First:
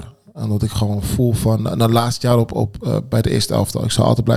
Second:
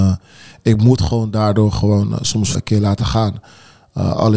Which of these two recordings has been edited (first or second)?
second